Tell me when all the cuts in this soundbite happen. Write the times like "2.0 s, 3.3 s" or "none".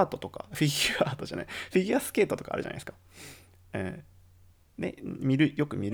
none